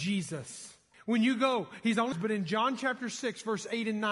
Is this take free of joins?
no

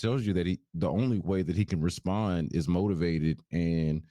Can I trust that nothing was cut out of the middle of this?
yes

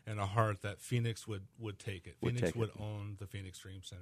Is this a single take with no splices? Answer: yes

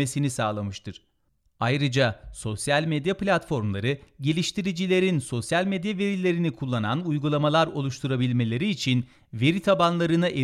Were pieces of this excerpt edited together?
no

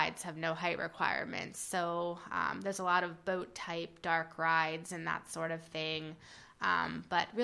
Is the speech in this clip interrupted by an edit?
no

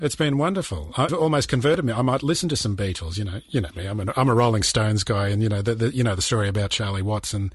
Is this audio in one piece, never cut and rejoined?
no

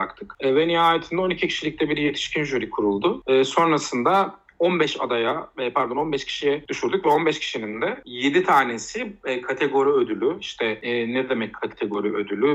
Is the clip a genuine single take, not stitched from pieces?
yes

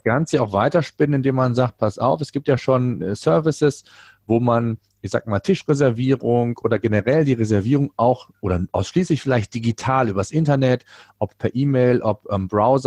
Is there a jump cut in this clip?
no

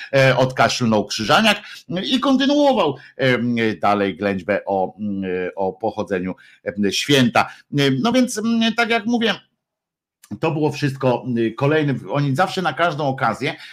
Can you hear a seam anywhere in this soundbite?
no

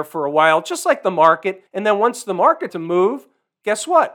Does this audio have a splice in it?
yes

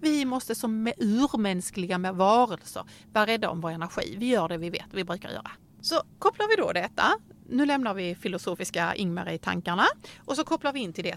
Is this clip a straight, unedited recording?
yes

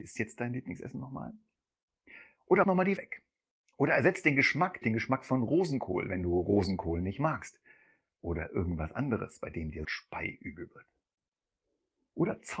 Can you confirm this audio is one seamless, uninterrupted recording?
no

